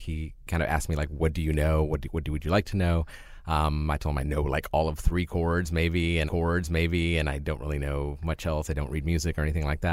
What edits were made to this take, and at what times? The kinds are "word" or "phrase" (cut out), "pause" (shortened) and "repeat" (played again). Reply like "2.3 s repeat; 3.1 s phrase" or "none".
6.3 s repeat